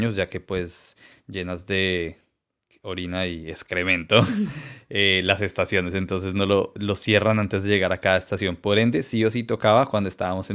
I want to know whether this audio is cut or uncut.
uncut